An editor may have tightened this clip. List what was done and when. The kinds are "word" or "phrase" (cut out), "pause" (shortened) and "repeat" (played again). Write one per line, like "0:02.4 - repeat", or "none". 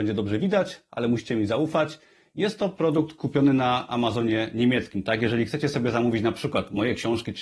none